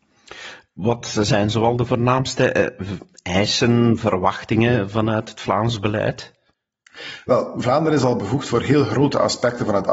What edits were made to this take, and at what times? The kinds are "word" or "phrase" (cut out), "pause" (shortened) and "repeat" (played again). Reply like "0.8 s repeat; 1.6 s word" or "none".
none